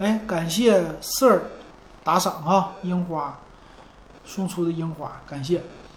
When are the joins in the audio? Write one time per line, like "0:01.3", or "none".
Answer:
none